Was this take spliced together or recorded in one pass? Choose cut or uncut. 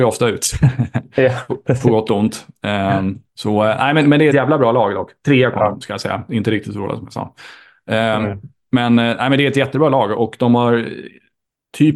cut